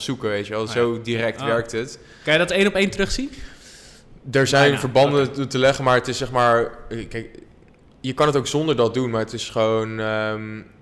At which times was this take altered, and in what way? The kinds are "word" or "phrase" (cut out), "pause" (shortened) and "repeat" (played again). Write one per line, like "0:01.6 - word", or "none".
none